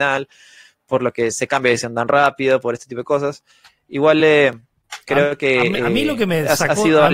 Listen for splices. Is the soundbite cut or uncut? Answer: uncut